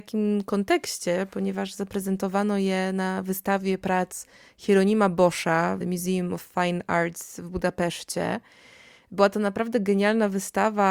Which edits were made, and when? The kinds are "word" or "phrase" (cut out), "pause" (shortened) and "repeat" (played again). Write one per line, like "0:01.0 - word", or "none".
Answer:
0:05.8 - word